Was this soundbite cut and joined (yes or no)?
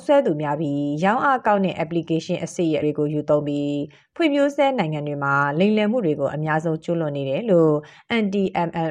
yes